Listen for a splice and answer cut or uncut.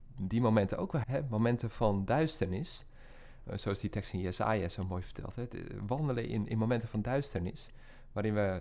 cut